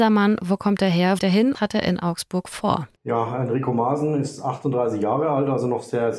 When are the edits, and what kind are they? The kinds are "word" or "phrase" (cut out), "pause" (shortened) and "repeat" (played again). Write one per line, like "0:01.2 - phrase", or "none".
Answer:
0:01.2 - word
0:01.5 - phrase
0:03.0 - pause